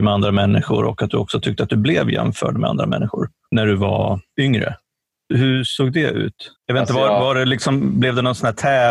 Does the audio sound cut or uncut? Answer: cut